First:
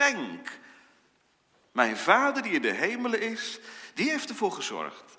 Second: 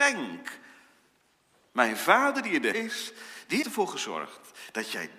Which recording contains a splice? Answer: second; 2 cuts; at 2.7 s, 3.6 s

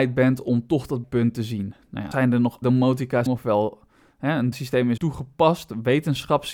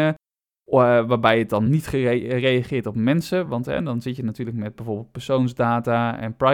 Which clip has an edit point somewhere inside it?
first; 6 cuts; at 1.0 s, 2.1 s, 2.6 s, 3.3 s, 4.5 s, 5.0 s

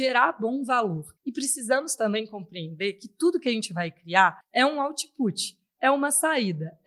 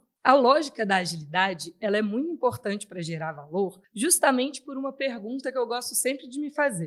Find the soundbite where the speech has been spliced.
first; 1 cut; at 1.2 s

